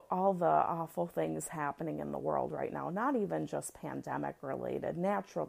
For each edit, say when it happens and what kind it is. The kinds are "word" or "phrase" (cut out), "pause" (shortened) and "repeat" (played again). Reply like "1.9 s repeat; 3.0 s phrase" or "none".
none

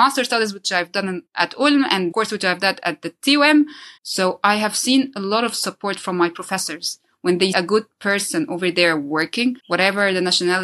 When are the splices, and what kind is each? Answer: 1.3 s pause; 2.1 s phrase; 4.0 s pause; 7.5 s word; 9.6 s pause

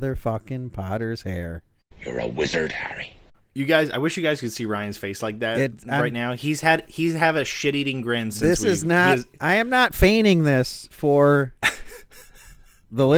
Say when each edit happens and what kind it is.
none

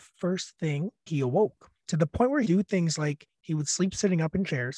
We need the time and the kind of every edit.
1.1 s word; 1.8 s pause; 2.5 s word

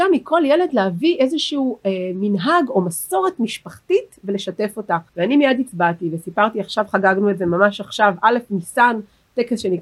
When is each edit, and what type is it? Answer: 5.1 s pause

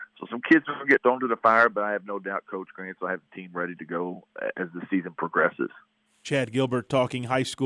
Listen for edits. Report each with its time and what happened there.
none

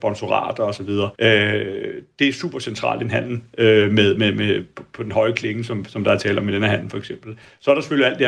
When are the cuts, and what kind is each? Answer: 1.1 s pause

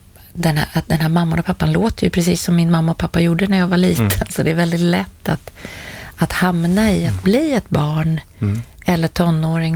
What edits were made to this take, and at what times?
none

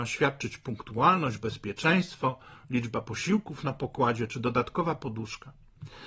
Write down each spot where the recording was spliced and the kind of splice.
none

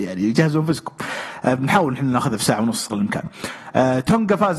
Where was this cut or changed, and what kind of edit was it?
2.9 s word

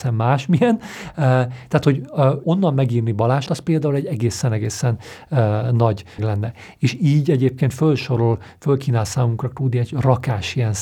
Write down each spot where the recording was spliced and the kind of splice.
2.4 s word; 3.5 s word; 6.2 s word

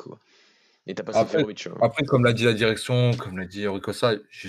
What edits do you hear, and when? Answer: none

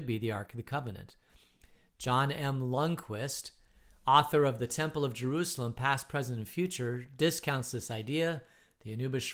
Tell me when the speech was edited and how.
none

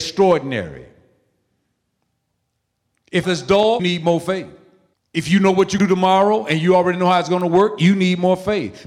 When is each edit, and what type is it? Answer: 3.2 s phrase; 3.8 s word; 4.9 s pause; 5.8 s word

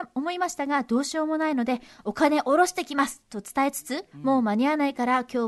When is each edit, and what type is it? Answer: 4.1 s pause

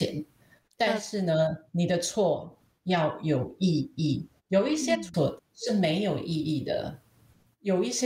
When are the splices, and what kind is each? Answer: 4.4 s pause

